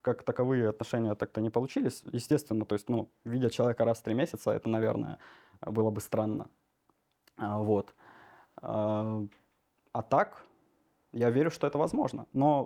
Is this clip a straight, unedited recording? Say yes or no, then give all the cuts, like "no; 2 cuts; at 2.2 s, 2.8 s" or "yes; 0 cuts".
yes; 0 cuts